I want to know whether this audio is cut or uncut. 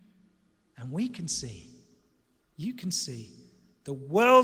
uncut